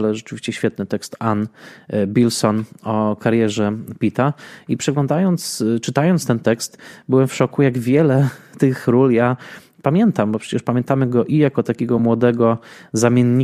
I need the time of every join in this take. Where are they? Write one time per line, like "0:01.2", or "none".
none

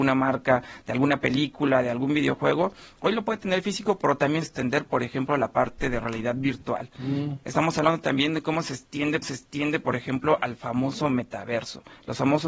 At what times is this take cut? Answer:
0:04.4
0:09.2

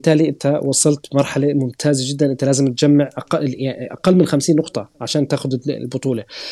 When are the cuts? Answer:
none

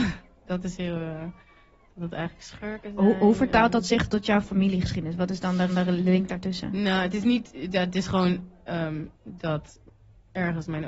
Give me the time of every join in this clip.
0:04.1
0:05.7
0:09.1

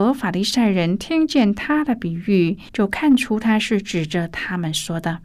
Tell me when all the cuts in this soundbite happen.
0:02.7

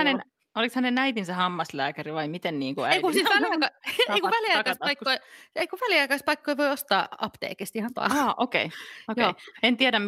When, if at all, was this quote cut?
0:07.9

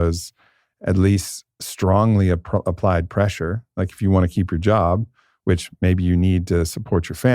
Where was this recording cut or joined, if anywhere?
none

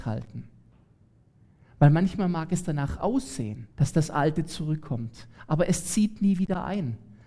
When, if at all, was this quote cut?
0:03.7

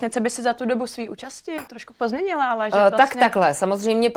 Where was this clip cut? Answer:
0:01.7

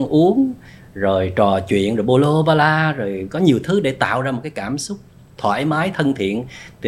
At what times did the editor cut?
none

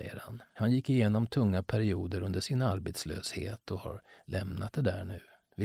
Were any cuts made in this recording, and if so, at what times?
none

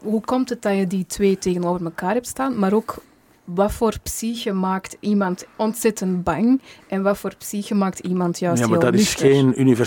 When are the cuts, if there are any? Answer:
none

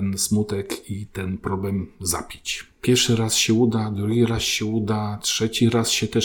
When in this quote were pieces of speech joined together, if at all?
none

